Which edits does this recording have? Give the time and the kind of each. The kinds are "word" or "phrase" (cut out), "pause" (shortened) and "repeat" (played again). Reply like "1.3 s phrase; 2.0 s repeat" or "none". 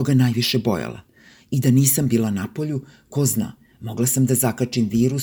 none